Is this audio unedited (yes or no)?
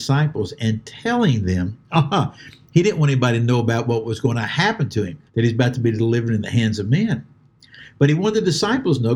no